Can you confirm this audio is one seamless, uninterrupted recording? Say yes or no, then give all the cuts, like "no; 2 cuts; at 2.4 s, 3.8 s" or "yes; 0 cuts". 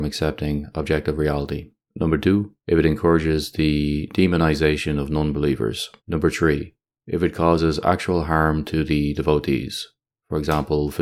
no; 4 cuts; at 1.8 s, 2.6 s, 6.0 s, 6.8 s